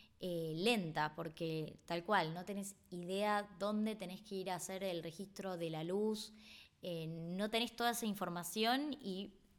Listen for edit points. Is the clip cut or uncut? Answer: uncut